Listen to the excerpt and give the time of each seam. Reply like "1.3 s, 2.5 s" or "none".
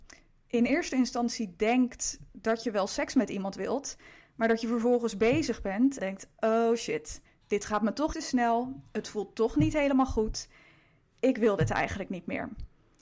6.0 s, 7.3 s, 8.1 s